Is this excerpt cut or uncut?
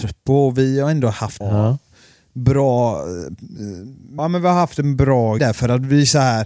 cut